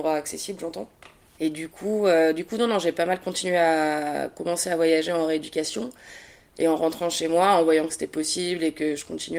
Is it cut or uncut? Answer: uncut